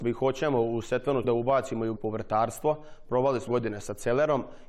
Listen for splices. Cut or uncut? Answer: cut